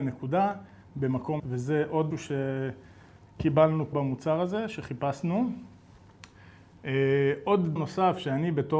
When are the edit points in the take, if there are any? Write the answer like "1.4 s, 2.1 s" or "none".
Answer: 1.4 s, 2.1 s, 3.9 s, 7.8 s